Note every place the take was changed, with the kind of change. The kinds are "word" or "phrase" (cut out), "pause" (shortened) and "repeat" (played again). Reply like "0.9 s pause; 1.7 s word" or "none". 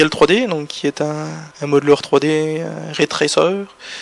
1.5 s pause